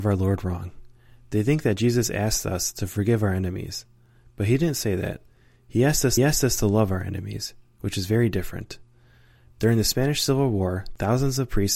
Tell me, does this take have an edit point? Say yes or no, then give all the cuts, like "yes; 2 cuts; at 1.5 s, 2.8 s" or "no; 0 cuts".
yes; 1 cut; at 6.2 s